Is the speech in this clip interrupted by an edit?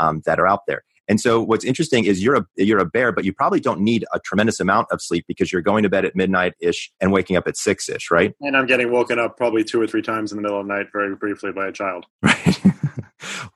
yes; 1 cut; at 6.9 s

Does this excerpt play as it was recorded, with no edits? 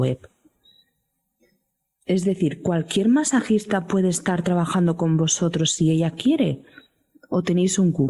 yes; 0 cuts

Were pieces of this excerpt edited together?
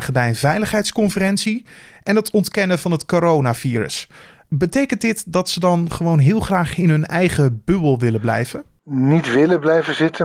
no; 0 cuts

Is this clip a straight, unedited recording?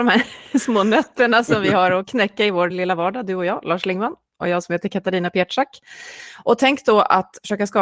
yes; 0 cuts

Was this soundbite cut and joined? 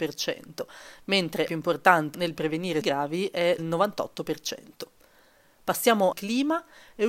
yes; 5 cuts; at 1.5 s, 2.1 s, 2.8 s, 3.6 s, 6.1 s

